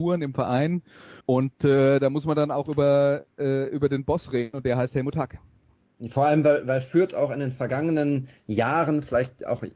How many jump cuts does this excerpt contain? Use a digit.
2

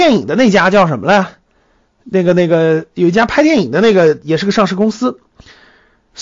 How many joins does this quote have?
0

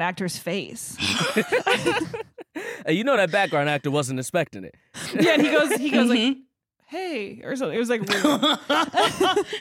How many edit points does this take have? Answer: 0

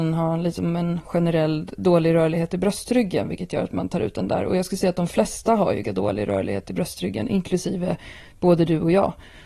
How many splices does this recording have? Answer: 1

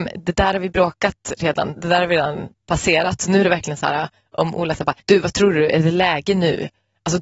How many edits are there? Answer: 1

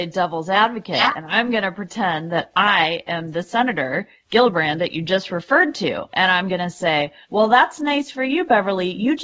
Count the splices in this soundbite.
1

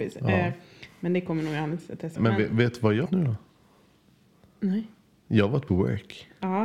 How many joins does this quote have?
3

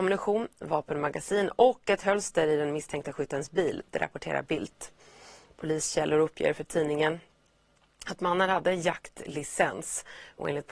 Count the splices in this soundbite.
0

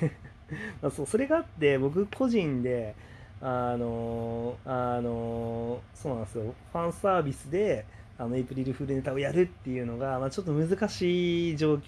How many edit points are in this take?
1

